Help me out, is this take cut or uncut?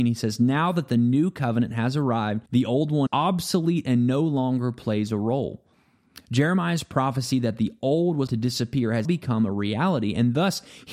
cut